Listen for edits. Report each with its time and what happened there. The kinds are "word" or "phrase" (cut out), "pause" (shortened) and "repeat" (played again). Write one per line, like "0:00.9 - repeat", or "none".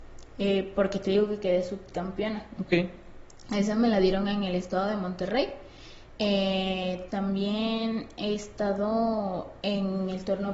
none

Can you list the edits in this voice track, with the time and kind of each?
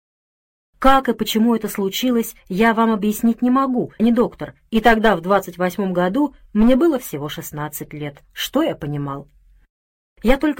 0:04.0 - word
0:04.7 - pause

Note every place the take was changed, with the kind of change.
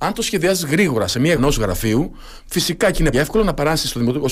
0:01.4 - word
0:03.1 - word

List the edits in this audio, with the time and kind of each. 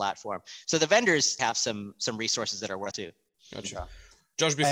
0:01.4 - word
0:02.9 - phrase

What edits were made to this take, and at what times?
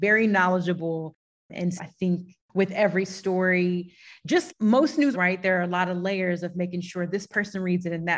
0:01.8 - word
0:04.5 - word
0:05.1 - word

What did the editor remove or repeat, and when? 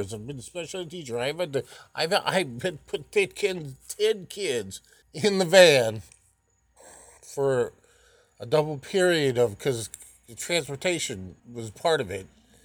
0:05.0 - pause
0:07.2 - pause
0:11.4 - pause

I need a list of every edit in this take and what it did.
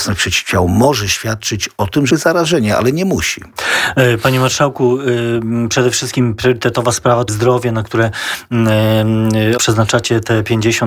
0:02.1 - word
0:07.3 - word
0:09.6 - word

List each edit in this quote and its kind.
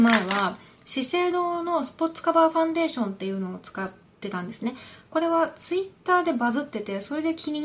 none

